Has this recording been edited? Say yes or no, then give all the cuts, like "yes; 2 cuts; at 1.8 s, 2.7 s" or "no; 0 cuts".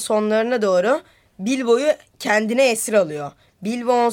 no; 0 cuts